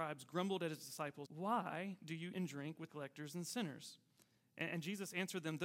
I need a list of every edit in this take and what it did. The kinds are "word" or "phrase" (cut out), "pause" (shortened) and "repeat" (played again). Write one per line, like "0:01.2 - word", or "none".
0:01.2 - word
0:02.3 - word
0:02.9 - word